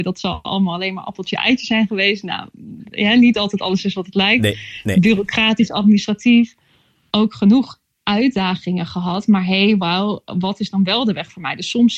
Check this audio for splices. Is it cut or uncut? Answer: uncut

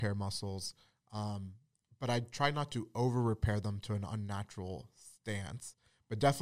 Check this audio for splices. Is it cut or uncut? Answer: uncut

